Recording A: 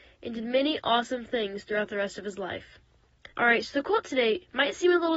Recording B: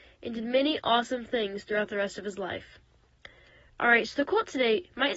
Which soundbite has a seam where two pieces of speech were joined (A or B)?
A